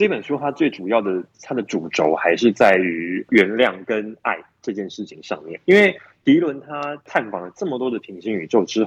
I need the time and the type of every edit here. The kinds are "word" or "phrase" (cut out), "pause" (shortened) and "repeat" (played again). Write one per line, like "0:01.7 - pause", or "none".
0:05.6 - pause